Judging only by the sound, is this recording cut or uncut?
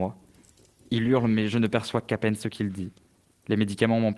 uncut